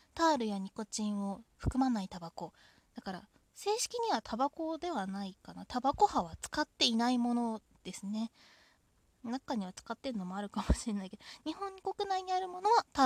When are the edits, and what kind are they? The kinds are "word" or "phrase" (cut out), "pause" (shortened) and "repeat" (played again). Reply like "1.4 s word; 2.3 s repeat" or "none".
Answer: none